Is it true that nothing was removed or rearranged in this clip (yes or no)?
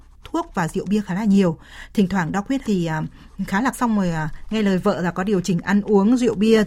no